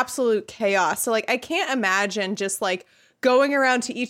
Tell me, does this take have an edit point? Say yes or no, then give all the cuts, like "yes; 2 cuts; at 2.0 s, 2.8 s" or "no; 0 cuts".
no; 0 cuts